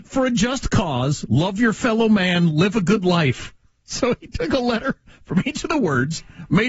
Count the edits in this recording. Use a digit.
0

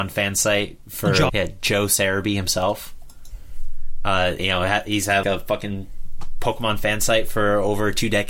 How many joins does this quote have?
3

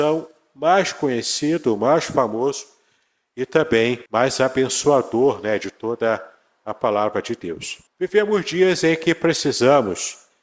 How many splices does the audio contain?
2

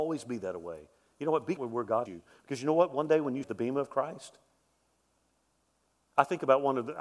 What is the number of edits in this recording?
3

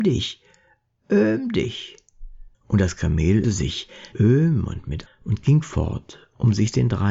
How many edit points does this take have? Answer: 4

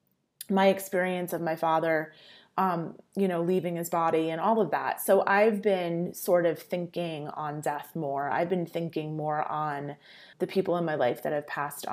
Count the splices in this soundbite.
1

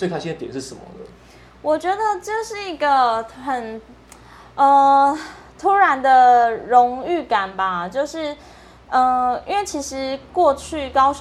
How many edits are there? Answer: 0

